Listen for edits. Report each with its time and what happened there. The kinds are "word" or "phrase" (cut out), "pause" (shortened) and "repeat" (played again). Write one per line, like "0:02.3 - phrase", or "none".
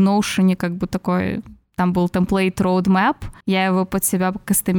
0:03.4 - pause